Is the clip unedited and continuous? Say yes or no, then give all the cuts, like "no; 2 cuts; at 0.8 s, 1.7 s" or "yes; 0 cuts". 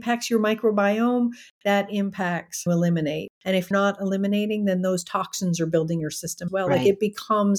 no; 5 cuts; at 2.7 s, 3.3 s, 3.7 s, 6.0 s, 6.5 s